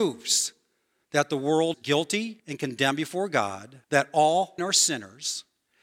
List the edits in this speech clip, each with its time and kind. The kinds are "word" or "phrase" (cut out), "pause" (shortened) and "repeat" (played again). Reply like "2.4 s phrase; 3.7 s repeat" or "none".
1.7 s word; 2.4 s pause; 3.8 s pause; 4.6 s word